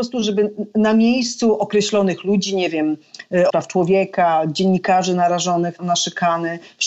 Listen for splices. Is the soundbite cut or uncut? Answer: cut